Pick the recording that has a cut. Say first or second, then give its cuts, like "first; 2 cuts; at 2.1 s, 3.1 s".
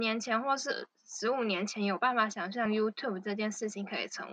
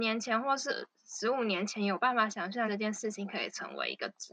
second; 1 cut; at 2.7 s